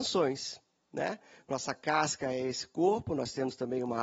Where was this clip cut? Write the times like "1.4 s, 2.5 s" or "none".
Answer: 1.7 s